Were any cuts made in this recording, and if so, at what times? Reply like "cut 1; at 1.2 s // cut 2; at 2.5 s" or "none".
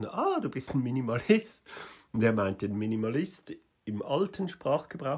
none